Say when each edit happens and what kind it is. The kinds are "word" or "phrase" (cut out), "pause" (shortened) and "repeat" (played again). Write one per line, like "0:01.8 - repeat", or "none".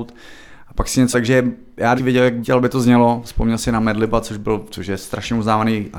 0:01.1 - word
0:02.0 - word
0:02.4 - word
0:03.6 - word